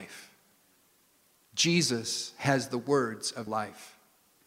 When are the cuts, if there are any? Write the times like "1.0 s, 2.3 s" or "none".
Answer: 3.5 s